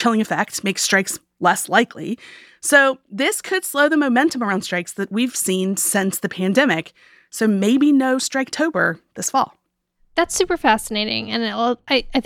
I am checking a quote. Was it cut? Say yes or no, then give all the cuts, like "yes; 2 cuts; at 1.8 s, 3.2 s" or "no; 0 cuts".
no; 0 cuts